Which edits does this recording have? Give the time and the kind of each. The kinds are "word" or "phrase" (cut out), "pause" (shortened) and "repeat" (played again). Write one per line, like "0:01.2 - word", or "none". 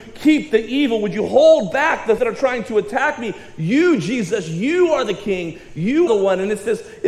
0:02.2 - word
0:06.1 - word